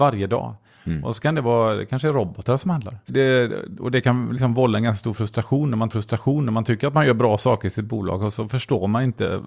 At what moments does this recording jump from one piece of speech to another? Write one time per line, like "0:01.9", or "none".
0:03.1
0:05.9